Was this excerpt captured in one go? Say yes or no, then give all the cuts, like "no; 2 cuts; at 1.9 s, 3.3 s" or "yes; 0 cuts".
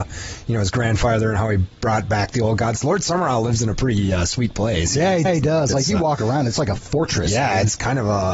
no; 1 cut; at 5.2 s